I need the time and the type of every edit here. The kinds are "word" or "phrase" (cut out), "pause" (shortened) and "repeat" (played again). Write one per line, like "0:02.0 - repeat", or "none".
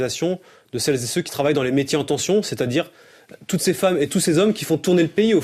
none